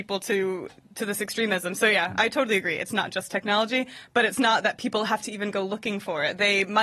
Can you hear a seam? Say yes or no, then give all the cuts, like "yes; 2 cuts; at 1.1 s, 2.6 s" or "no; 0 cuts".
no; 0 cuts